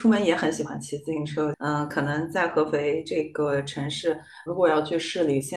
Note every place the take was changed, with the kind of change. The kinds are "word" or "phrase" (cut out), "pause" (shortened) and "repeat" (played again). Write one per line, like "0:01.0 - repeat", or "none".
0:04.5 - word